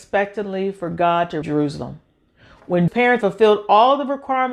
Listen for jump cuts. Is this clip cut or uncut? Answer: cut